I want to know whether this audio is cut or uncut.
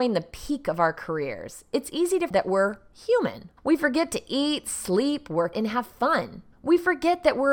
cut